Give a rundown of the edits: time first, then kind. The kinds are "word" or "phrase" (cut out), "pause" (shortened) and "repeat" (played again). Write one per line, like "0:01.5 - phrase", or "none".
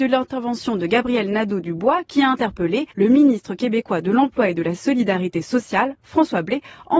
0:02.9 - pause